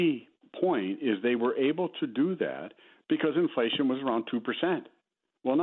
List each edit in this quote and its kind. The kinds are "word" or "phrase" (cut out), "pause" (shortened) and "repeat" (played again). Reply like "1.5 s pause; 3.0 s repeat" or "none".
none